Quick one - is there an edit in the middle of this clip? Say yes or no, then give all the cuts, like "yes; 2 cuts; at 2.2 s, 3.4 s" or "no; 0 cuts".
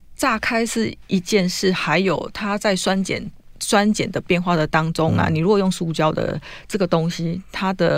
yes; 1 cut; at 1.0 s